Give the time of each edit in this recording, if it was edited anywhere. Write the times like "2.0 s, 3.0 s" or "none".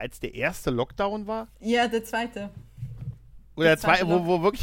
1.5 s